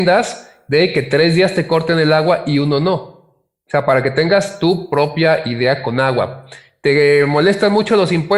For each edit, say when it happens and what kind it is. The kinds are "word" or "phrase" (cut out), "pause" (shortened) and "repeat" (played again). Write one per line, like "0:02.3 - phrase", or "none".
none

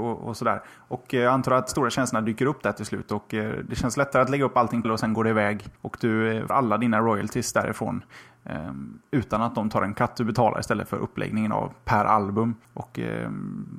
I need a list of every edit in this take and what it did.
0:01.7 - phrase
0:04.8 - phrase
0:05.8 - pause
0:06.5 - word
0:12.6 - pause

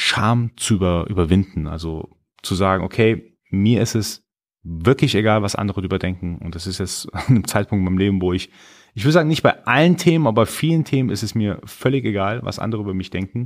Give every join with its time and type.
none

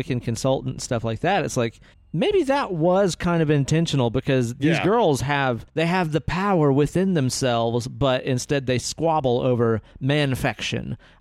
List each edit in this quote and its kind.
0:01.9 - pause
0:05.7 - pause

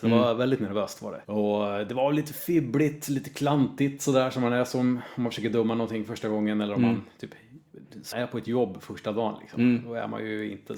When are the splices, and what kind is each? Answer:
0:01.2 - pause
0:08.1 - word

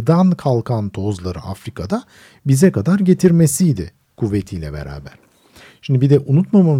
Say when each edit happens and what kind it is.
none

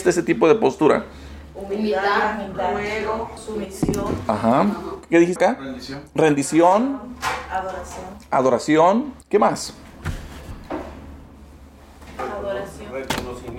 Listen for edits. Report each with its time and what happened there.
0:03.4 - word
0:05.4 - word
0:09.2 - pause

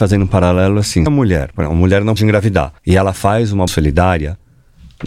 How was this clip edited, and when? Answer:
0:01.1 - word
0:02.2 - word
0:02.8 - pause
0:03.7 - word

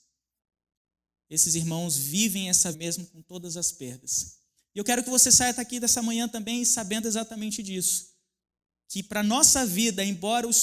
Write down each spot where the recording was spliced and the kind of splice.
0:02.7 - word

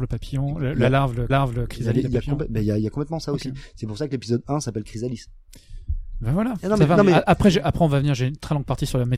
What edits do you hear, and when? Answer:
0:01.3 - repeat

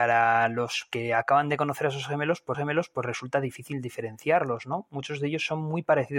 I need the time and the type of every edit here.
0:02.5 - repeat

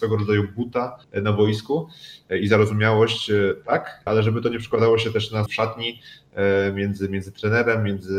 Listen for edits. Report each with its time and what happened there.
0:01.0 - pause
0:04.1 - word
0:05.5 - word

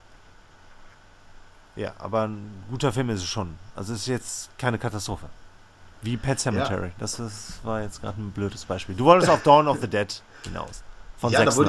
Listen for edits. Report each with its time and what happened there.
none

